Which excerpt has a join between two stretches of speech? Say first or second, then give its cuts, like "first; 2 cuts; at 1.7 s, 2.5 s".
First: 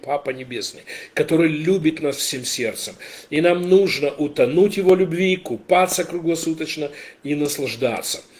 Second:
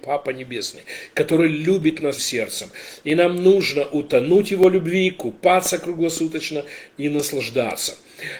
second; 1 cut; at 2.2 s